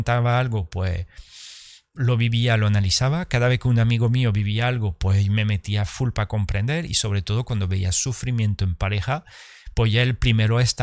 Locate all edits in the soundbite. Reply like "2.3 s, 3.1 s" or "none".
none